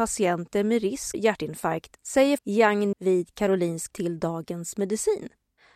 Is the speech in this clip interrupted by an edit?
yes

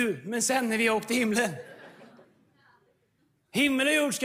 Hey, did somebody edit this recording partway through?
no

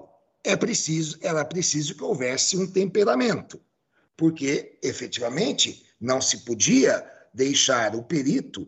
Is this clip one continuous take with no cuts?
yes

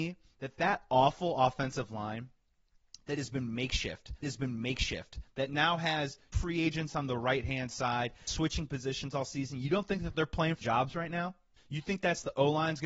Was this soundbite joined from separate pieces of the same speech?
yes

